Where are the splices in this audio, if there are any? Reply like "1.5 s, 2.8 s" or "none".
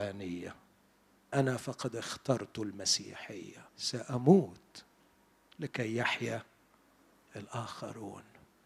1.3 s, 3.7 s